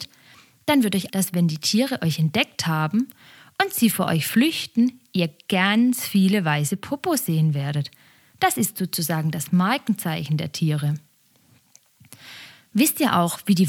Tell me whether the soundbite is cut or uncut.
cut